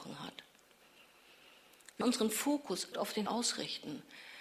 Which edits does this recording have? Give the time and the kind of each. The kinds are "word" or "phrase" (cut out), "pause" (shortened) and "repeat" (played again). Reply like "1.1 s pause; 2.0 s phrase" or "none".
2.0 s word; 2.9 s word; 3.3 s word